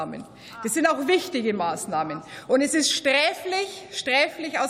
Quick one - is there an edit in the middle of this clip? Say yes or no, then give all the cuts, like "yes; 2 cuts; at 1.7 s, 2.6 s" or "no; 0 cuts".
no; 0 cuts